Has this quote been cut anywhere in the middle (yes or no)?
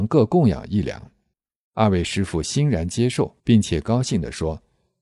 yes